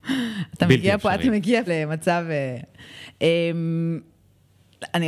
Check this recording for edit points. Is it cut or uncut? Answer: cut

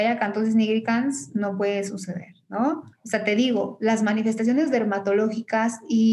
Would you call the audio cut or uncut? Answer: cut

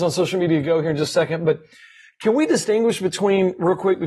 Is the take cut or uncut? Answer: uncut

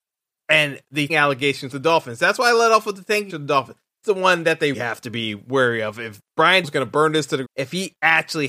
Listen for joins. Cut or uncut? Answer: cut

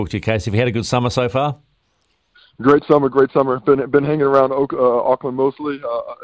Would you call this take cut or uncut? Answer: uncut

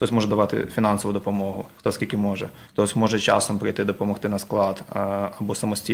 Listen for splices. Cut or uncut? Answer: cut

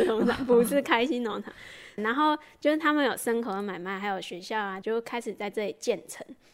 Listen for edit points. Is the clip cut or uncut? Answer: cut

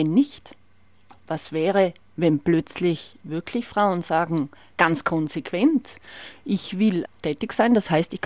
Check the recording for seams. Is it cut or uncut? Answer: cut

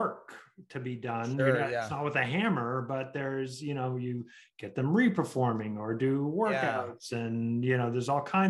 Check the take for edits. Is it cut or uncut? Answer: uncut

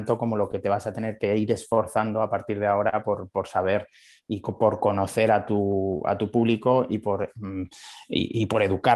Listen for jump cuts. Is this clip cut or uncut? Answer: uncut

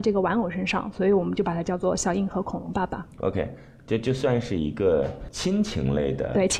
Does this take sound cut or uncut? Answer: uncut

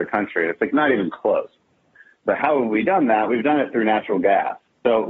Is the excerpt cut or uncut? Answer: uncut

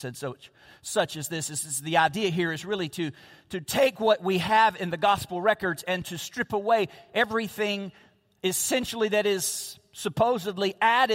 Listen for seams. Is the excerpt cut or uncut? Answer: uncut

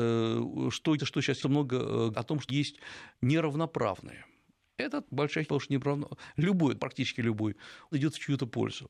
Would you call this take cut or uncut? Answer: cut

